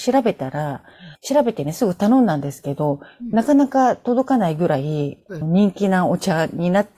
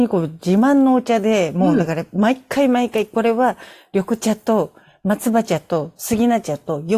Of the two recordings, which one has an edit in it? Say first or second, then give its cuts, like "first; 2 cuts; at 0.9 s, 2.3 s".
first; 2 cuts; at 1.1 s, 5.4 s